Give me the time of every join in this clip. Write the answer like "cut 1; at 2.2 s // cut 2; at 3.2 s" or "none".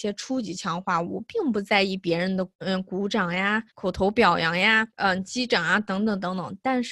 cut 1; at 2.5 s // cut 2; at 3.7 s // cut 3; at 4.9 s